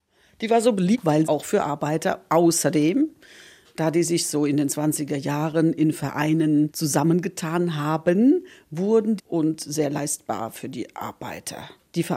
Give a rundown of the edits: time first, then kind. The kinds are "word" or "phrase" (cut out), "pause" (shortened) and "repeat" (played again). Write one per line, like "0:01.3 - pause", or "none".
0:01.3 - phrase
0:09.2 - phrase